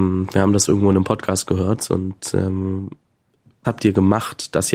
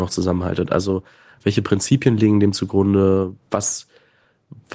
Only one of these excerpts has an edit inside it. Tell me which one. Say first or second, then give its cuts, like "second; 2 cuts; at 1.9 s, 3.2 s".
first; 1 cut; at 3.6 s